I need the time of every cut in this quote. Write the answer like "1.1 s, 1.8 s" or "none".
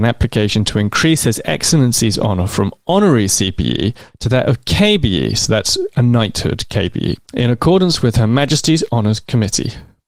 7.2 s